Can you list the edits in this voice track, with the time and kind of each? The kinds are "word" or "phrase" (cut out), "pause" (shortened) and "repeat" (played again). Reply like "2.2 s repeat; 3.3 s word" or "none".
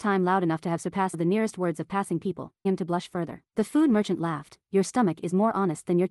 1.1 s word; 2.6 s word; 3.5 s pause